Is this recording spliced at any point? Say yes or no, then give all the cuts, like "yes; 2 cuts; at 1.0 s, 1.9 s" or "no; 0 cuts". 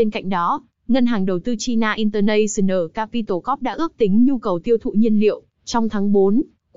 no; 0 cuts